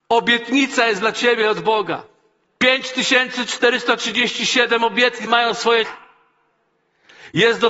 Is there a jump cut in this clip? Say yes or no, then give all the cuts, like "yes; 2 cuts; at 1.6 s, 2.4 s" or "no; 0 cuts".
yes; 2 cuts; at 5.3 s, 5.8 s